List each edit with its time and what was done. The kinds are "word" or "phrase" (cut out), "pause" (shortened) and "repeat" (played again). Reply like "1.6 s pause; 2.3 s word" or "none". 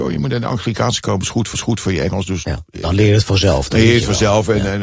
1.0 s word; 1.5 s repeat